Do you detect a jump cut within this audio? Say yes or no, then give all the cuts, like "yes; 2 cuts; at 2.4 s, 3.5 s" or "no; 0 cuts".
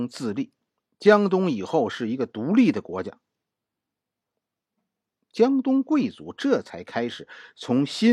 no; 0 cuts